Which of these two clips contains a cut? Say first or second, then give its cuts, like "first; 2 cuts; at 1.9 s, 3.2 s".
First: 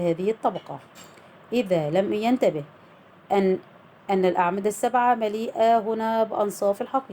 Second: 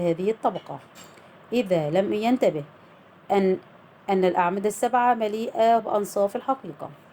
second; 1 cut; at 5.8 s